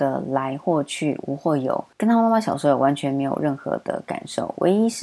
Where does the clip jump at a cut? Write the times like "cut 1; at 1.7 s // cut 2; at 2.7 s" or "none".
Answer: cut 1; at 1.9 s